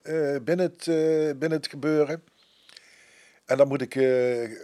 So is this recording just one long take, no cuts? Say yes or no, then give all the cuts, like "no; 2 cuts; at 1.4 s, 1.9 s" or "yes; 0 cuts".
yes; 0 cuts